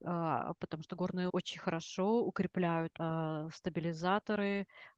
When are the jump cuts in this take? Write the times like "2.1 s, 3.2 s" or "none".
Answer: 1.3 s, 3.0 s